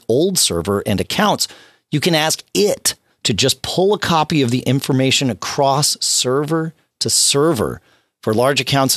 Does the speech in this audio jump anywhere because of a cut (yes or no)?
no